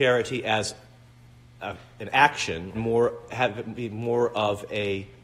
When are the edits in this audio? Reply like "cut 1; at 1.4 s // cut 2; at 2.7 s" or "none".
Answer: cut 1; at 2.7 s